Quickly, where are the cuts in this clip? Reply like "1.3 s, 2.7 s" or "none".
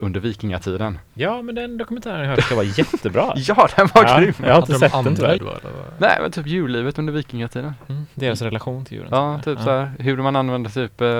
1.0 s, 5.4 s